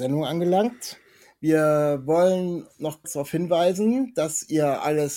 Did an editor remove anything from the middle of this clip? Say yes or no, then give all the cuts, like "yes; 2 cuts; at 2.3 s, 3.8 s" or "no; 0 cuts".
yes; 1 cut; at 3.0 s